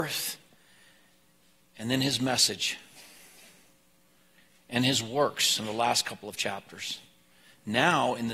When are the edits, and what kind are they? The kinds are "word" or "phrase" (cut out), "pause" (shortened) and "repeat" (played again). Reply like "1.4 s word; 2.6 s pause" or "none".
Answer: none